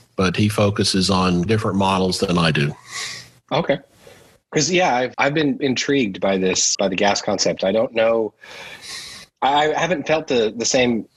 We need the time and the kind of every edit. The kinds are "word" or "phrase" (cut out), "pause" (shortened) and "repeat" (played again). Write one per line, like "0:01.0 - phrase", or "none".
0:01.5 - word
0:05.1 - word
0:05.6 - word
0:06.7 - word